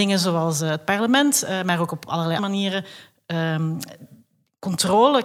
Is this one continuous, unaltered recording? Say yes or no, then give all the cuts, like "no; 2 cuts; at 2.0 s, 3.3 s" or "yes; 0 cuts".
no; 1 cut; at 2.4 s